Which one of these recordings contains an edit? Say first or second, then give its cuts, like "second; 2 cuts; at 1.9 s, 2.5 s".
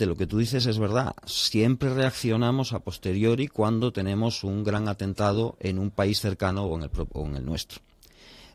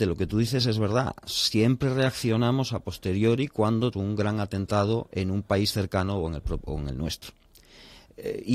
second; 1 cut; at 3.9 s